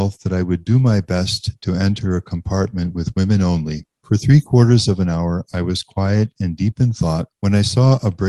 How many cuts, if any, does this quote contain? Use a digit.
1